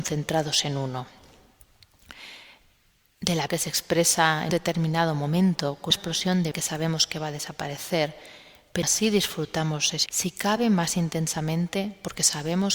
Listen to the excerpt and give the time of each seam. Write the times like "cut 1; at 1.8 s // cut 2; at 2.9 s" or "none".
cut 1; at 3.5 s // cut 2; at 4.5 s // cut 3; at 5.9 s // cut 4; at 6.5 s // cut 5; at 8.8 s // cut 6; at 10.1 s